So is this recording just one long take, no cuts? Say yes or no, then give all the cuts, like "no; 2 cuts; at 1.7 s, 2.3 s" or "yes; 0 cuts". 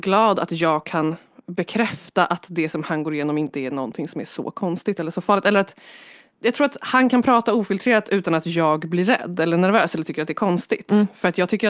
yes; 0 cuts